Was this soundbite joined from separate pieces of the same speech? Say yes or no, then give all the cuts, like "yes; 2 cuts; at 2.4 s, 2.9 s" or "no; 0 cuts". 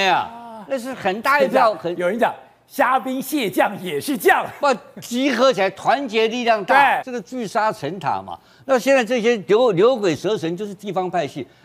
no; 0 cuts